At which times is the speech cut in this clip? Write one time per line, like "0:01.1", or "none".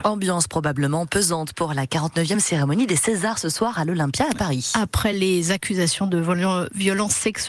none